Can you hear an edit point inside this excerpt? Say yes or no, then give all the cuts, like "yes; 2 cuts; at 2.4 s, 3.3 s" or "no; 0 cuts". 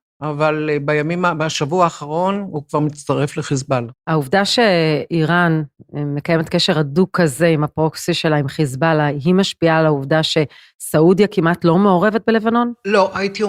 yes; 1 cut; at 4.0 s